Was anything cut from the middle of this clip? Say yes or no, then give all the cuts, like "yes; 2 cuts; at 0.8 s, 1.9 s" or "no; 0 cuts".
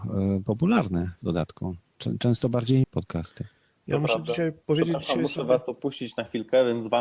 yes; 2 cuts; at 2.8 s, 4.6 s